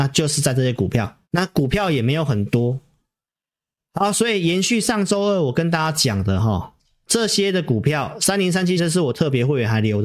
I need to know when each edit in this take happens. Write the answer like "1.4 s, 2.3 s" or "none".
1.2 s, 8.8 s

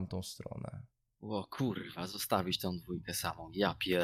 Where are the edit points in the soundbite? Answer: 0.9 s

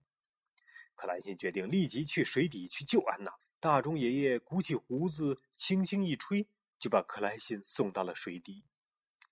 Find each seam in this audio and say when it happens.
3.4 s

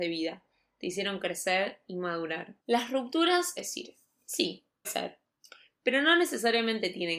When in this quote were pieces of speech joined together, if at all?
2.6 s, 3.6 s, 4.8 s

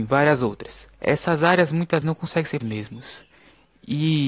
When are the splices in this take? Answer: 0.9 s, 2.0 s, 2.6 s

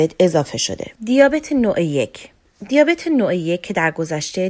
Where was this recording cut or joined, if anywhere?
0.9 s

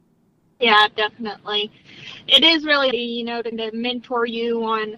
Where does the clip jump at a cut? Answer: 2.9 s, 3.5 s

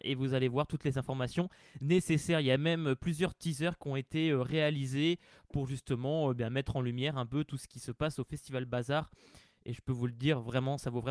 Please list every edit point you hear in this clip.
none

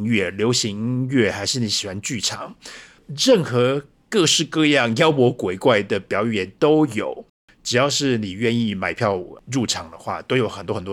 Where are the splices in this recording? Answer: none

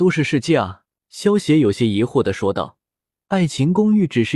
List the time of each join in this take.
1.0 s, 2.9 s

